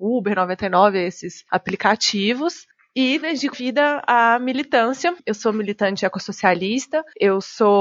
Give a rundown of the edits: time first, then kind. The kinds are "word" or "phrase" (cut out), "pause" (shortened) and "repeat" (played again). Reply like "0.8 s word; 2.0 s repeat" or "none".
3.2 s word; 3.5 s word; 5.2 s pause

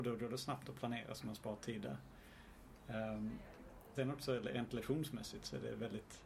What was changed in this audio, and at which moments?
3.9 s word

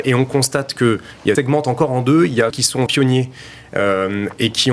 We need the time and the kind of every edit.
1.4 s phrase; 2.5 s word; 2.9 s word

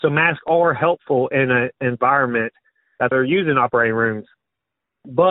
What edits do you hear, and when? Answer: 3.1 s word

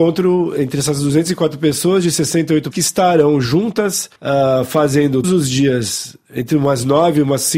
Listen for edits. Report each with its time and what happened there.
2.7 s word; 4.2 s pause; 5.2 s word

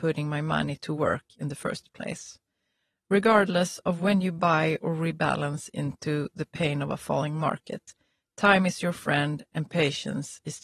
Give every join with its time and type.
none

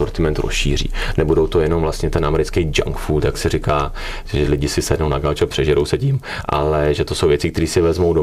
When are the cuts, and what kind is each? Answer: none

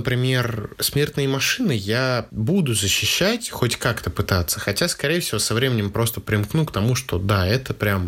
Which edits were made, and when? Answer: none

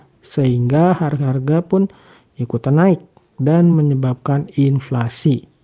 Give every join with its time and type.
none

